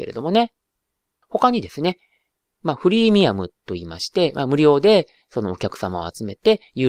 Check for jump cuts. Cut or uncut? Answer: uncut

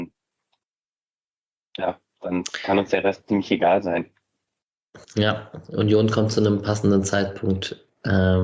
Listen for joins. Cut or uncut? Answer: cut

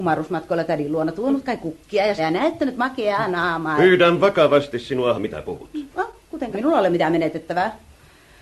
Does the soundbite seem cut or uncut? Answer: cut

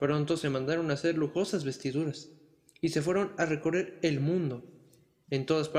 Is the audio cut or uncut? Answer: uncut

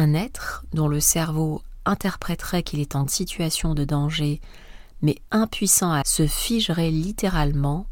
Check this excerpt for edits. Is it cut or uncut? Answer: cut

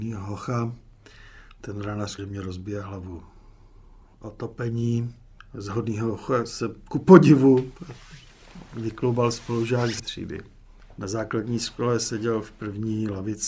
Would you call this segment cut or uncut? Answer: cut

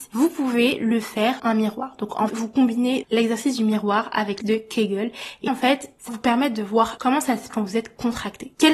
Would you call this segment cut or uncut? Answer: cut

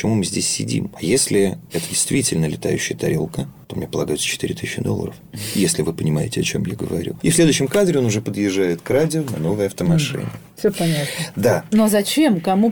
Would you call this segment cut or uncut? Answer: uncut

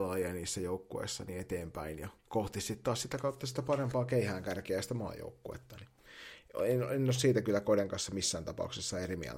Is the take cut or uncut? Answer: cut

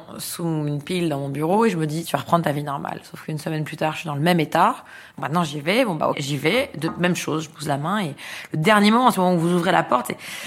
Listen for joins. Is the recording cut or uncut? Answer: cut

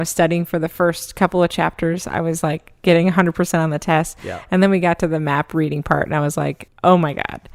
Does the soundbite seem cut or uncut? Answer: uncut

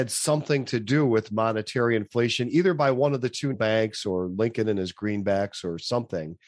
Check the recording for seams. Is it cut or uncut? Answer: cut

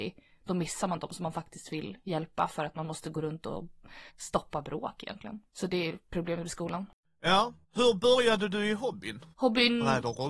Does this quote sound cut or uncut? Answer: cut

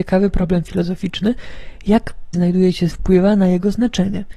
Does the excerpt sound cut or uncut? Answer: cut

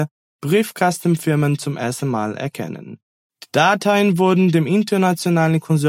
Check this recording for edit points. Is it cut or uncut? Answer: uncut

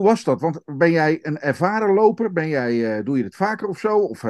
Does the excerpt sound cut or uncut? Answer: uncut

